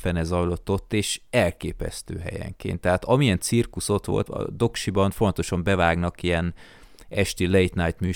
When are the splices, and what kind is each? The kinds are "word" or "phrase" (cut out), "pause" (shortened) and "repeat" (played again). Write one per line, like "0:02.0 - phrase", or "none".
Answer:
0:04.3 - word